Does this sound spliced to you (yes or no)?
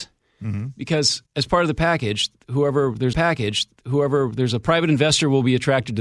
yes